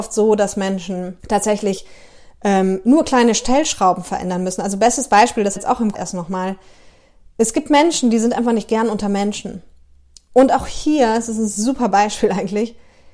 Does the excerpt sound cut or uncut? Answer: cut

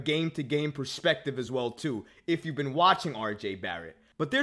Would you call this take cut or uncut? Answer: uncut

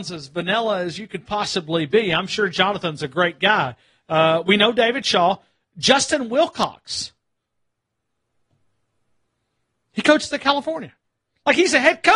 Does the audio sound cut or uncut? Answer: uncut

